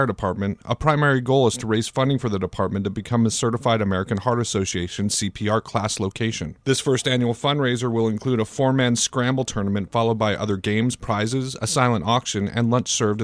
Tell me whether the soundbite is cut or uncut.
cut